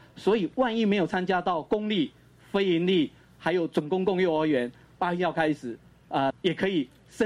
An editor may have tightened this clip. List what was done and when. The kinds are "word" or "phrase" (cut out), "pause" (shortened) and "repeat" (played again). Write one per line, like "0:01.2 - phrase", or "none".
0:06.3 - word

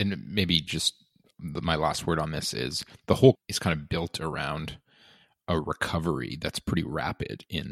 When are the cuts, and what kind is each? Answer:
0:03.3 - word

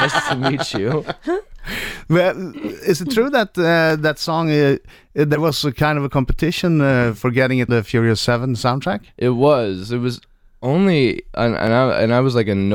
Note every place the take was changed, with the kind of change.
0:07.7 - word

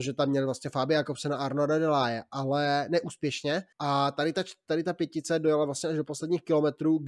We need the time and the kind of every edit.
0:03.7 - pause

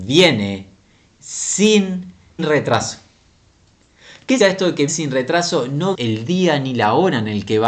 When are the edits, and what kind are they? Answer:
0:02.4 - word
0:04.4 - word
0:04.9 - word
0:05.9 - word

